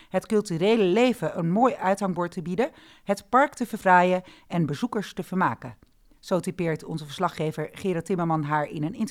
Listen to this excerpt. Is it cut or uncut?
uncut